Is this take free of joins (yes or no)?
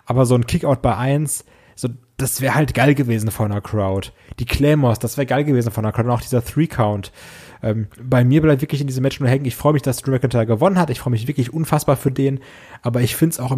no